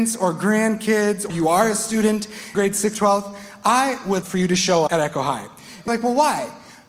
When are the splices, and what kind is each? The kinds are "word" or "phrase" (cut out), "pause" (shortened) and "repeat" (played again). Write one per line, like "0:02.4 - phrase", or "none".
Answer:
0:01.3 - word
0:02.5 - word
0:02.9 - word
0:04.2 - word
0:04.9 - word
0:05.9 - word